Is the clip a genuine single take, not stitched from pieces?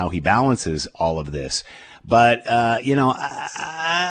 yes; 0 cuts

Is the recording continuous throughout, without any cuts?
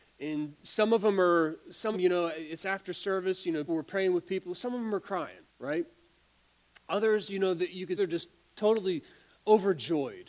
no; 4 cuts; at 1.9 s, 3.7 s, 5.5 s, 8.0 s

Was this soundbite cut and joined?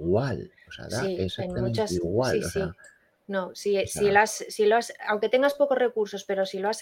no; 0 cuts

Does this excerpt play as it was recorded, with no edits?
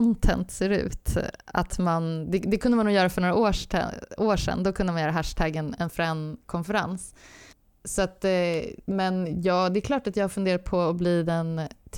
yes; 0 cuts

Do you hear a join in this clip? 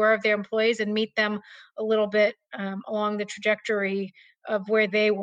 no; 0 cuts

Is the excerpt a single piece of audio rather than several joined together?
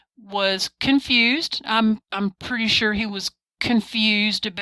yes; 0 cuts

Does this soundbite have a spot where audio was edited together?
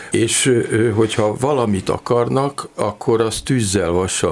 no; 0 cuts

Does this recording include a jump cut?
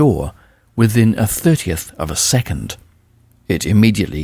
no; 0 cuts

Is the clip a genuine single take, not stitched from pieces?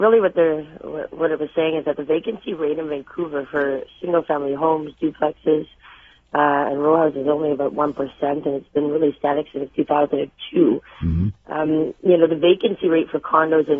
yes; 0 cuts

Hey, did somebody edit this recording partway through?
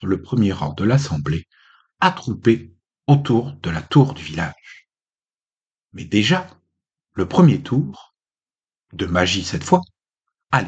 no; 0 cuts

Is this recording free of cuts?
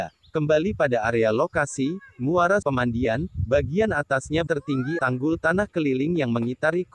no; 3 cuts; at 2.6 s, 4.5 s, 5.0 s

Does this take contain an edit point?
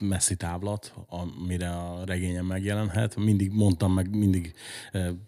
no; 0 cuts

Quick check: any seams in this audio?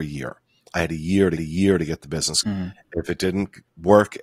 yes; 2 cuts; at 1.4 s, 2.4 s

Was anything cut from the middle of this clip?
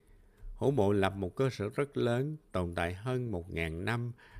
no; 0 cuts

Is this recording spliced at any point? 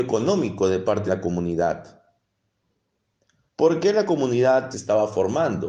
yes; 2 cuts; at 1.1 s, 4.7 s

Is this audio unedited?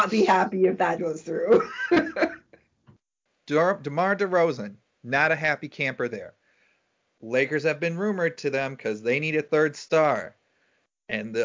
no; 1 cut; at 1.0 s

